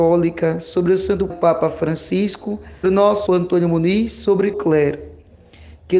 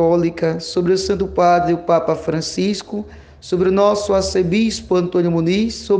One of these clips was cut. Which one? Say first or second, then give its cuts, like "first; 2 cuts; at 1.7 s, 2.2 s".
first; 4 cuts; at 1.3 s, 2.8 s, 3.3 s, 4.5 s